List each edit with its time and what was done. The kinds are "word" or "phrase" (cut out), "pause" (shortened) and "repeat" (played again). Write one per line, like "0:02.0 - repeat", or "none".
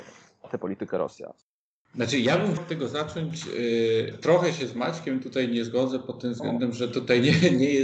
0:02.6 - word
0:04.1 - word